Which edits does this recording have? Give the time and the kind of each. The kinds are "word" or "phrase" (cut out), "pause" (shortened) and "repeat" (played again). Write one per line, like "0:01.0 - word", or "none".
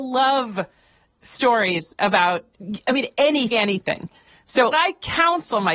0:02.8 - word
0:03.5 - word
0:04.7 - word